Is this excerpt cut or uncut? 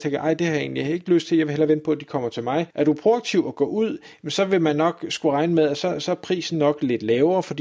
cut